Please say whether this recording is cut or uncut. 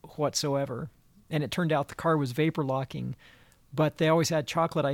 uncut